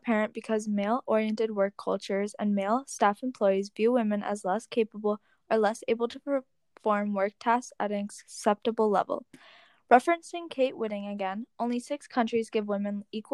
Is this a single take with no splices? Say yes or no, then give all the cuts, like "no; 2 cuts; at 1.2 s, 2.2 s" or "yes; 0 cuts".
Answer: yes; 0 cuts